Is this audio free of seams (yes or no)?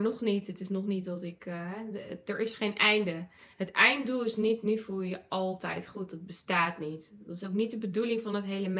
yes